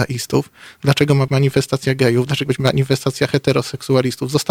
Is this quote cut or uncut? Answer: cut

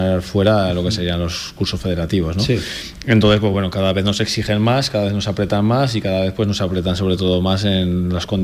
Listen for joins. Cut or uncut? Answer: uncut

